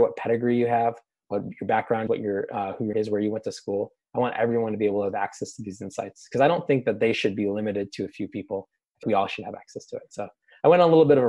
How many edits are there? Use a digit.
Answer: 3